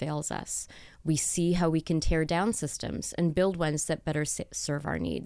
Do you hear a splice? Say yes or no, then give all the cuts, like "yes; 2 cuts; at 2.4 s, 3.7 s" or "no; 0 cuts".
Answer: no; 0 cuts